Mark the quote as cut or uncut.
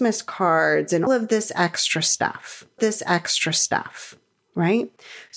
cut